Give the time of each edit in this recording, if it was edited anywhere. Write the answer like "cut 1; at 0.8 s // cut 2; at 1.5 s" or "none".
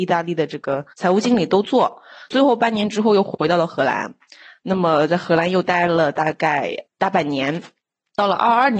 cut 1; at 0.9 s

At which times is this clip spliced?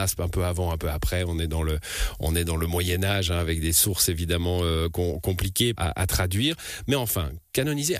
cut 1; at 5.8 s

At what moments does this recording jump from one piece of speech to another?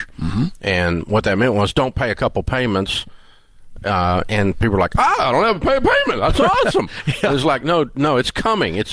none

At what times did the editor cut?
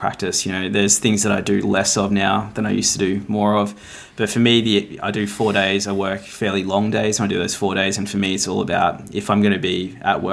none

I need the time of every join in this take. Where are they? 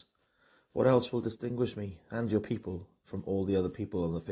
none

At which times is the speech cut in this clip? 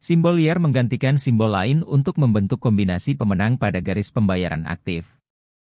none

